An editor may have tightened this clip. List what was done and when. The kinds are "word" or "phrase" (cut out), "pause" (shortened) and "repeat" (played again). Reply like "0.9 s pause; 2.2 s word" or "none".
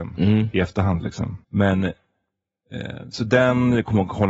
1.4 s pause